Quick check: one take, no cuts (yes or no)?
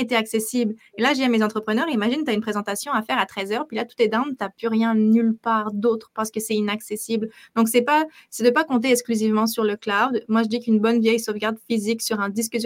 yes